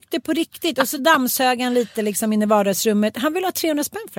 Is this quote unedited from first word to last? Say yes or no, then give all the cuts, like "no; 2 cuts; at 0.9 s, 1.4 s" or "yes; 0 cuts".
yes; 0 cuts